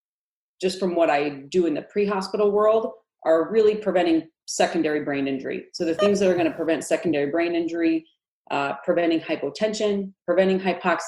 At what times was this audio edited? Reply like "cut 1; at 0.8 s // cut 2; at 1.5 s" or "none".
none